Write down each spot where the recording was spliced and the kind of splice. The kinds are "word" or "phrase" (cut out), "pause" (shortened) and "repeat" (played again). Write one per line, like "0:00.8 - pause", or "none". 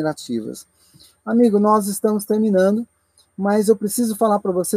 none